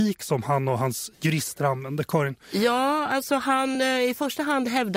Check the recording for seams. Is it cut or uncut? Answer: uncut